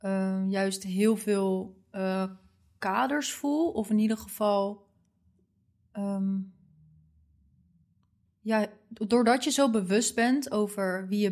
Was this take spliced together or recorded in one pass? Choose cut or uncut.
uncut